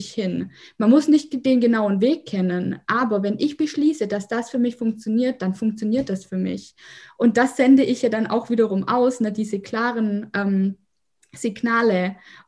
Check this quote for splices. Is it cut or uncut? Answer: uncut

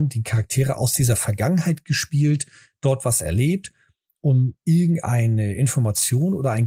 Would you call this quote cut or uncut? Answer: uncut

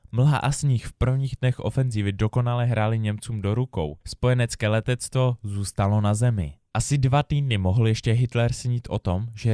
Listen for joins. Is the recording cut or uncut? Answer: cut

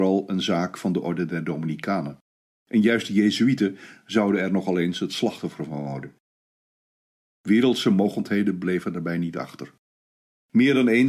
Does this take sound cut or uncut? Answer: uncut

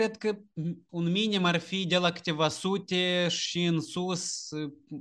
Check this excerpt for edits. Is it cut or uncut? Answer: uncut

